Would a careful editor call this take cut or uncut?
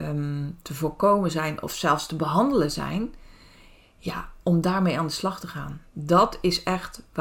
uncut